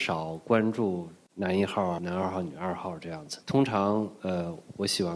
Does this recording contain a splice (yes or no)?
yes